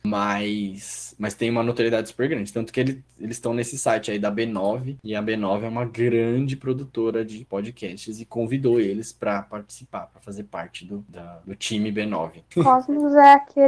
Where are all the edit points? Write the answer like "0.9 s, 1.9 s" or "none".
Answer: none